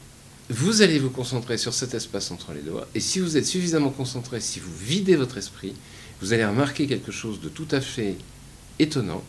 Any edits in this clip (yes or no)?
no